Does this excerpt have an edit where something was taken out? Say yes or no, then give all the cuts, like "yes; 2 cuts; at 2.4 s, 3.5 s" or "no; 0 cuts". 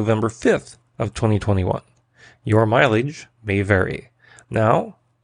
no; 0 cuts